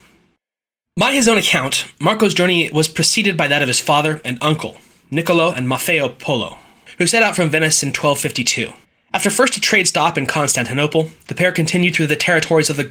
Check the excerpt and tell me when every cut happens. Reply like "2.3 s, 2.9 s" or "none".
8.8 s